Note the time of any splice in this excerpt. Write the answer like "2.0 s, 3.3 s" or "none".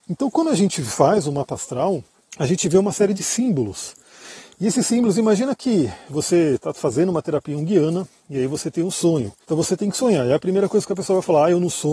2.3 s, 9.4 s